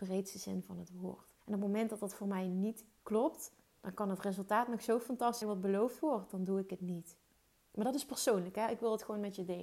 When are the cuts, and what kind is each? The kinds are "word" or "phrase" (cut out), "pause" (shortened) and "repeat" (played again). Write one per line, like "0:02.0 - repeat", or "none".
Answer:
0:01.4 - pause
0:05.4 - word